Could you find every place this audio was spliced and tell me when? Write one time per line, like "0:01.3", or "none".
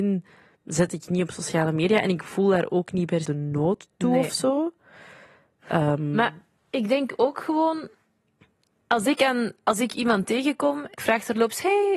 0:03.2
0:11.0